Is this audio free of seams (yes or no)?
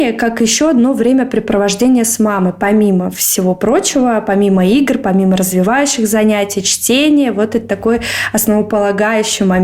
yes